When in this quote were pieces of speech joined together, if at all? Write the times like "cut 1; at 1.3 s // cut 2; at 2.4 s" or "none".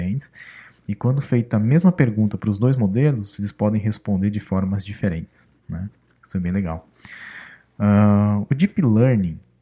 none